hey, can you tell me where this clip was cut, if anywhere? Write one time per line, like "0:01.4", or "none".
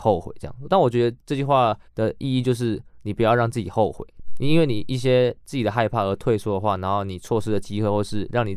0:01.9